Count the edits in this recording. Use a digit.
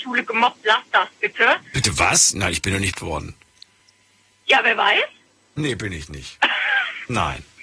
1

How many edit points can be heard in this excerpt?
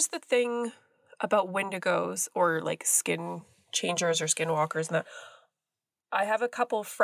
0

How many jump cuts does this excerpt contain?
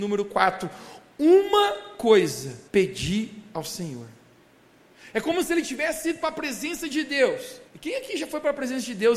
2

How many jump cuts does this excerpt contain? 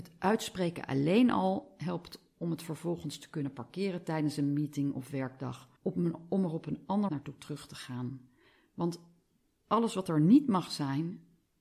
2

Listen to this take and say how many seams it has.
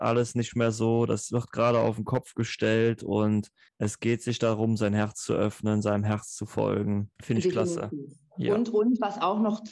2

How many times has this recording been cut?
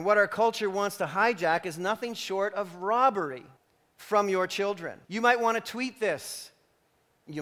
2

